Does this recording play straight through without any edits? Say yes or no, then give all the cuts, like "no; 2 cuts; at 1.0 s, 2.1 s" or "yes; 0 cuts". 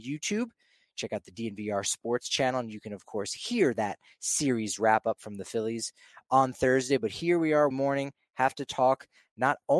no; 1 cut; at 7.7 s